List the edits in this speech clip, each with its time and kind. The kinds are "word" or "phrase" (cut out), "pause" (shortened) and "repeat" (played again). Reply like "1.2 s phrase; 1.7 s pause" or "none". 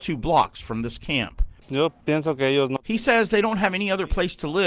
2.0 s pause